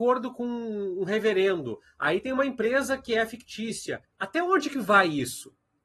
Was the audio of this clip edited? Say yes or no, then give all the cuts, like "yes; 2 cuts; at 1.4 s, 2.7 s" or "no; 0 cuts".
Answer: yes; 1 cut; at 4.0 s